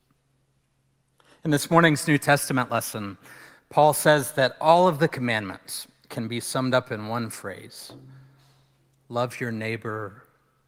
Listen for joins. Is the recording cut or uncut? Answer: uncut